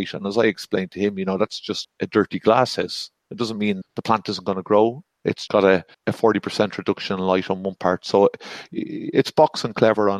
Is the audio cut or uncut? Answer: cut